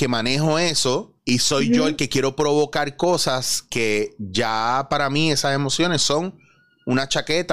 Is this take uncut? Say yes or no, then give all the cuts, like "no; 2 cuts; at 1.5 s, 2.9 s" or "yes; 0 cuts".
no; 1 cut; at 1.2 s